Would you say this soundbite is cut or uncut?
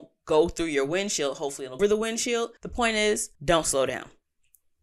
cut